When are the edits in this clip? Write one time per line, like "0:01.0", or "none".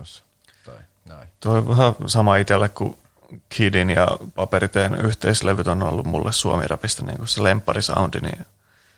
0:01.4